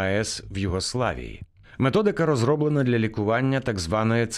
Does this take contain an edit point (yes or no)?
no